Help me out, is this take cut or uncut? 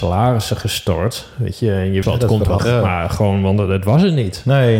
cut